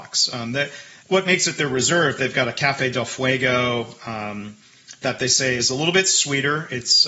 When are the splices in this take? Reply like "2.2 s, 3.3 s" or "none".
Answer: 1.0 s